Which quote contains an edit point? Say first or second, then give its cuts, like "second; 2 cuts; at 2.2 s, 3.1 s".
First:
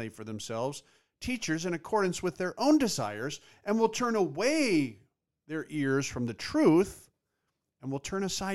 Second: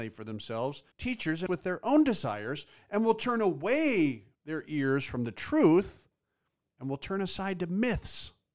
second; 3 cuts; at 0.9 s, 1.5 s, 4.3 s